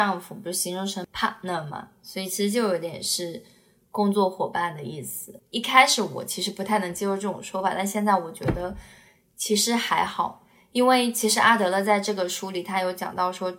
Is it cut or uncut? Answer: uncut